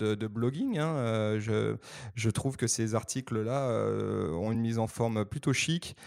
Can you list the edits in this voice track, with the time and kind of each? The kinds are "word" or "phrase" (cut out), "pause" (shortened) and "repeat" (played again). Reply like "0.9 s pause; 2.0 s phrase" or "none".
none